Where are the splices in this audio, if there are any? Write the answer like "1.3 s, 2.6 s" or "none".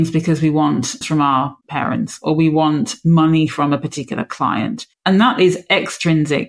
1.0 s, 1.6 s, 4.9 s